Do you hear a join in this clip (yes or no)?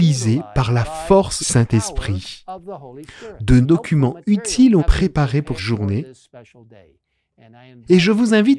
yes